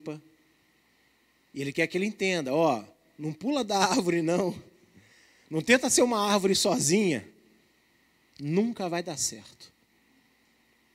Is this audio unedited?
yes; 0 cuts

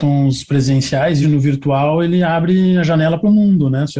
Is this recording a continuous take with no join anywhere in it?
no; 1 cut; at 1.2 s

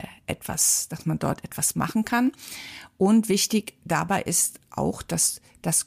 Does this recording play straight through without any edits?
yes; 0 cuts

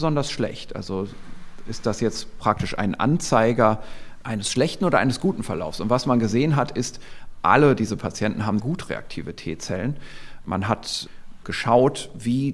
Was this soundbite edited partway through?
yes; 2 cuts; at 8.6 s, 11.4 s

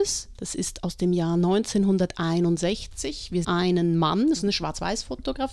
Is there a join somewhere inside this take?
yes; 1 cut; at 3.4 s

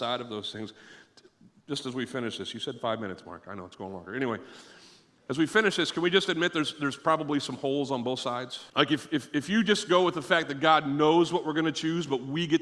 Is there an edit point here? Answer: yes; 1 cut; at 8.7 s

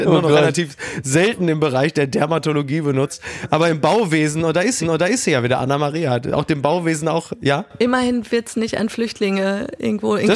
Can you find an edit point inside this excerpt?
yes; 1 cut; at 4.8 s

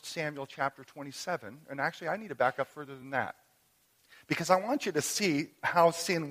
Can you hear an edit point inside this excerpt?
no; 0 cuts

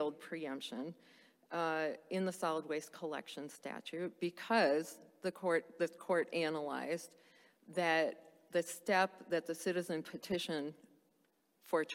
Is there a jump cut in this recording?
no; 0 cuts

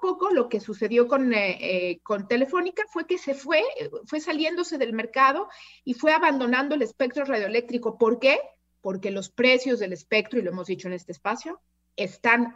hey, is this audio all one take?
yes; 0 cuts

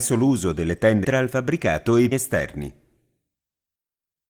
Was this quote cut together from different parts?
yes; 2 cuts; at 1.0 s, 2.1 s

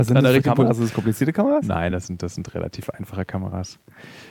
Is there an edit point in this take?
no; 0 cuts

